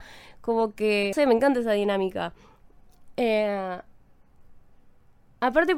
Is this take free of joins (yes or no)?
no